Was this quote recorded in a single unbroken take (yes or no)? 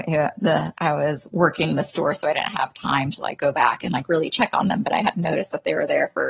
yes